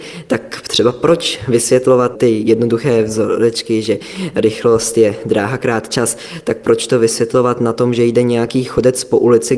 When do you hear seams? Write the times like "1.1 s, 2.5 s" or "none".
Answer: 2.2 s

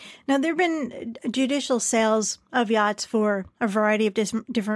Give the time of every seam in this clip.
none

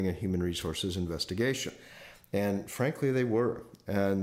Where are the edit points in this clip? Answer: none

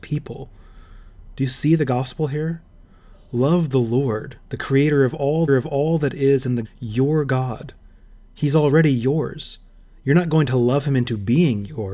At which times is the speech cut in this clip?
5.5 s, 6.6 s

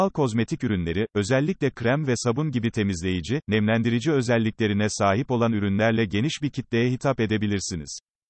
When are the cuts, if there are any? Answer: none

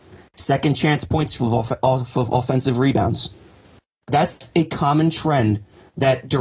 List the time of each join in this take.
1.4 s

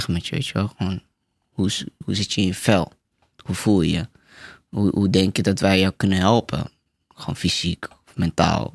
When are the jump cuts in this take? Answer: none

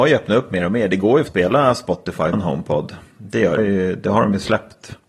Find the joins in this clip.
1.3 s, 2.3 s, 3.6 s

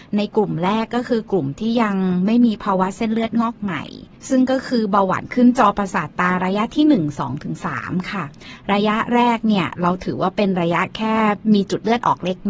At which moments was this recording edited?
4.2 s

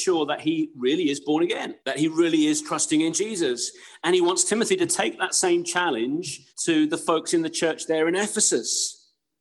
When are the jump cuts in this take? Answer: 1.8 s, 6.5 s

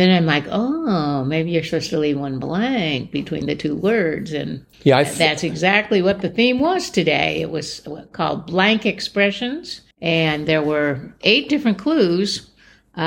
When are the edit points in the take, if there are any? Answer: 4.7 s, 9.9 s

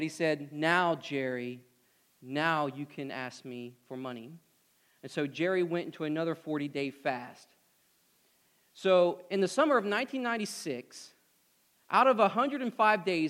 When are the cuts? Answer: none

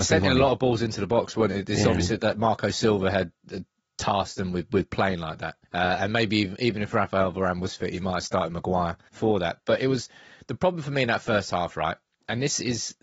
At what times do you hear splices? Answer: 5.6 s, 9.1 s

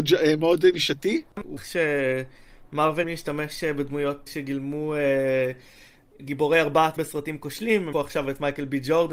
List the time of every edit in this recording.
1.6 s, 3.0 s, 4.3 s, 6.2 s, 7.0 s, 7.9 s

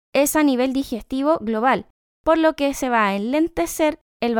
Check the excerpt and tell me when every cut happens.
none

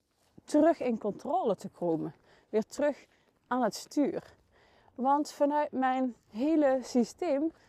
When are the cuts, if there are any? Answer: none

